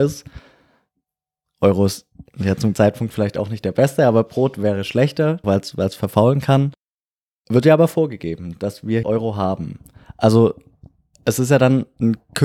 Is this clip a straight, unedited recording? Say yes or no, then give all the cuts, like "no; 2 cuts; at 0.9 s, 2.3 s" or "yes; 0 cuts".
no; 3 cuts; at 2.7 s, 5.4 s, 9.0 s